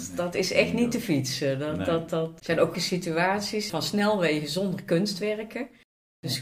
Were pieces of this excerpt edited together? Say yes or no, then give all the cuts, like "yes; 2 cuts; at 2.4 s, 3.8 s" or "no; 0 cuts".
yes; 3 cuts; at 2.4 s, 2.7 s, 3.7 s